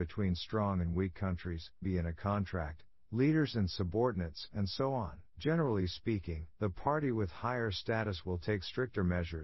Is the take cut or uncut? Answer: cut